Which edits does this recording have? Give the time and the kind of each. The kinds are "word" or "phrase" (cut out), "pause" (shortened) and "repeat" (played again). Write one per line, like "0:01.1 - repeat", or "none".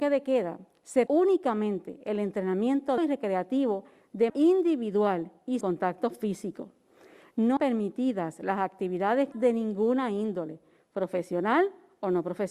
0:01.1 - word
0:03.0 - word
0:04.3 - word
0:05.6 - word
0:07.6 - word
0:09.3 - word